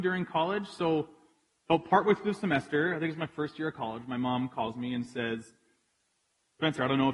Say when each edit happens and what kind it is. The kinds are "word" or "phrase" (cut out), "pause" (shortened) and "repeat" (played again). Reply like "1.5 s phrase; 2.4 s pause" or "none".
none